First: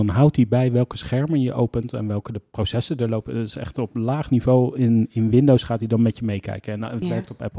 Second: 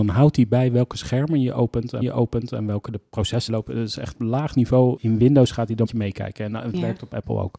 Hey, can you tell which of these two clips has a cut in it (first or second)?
second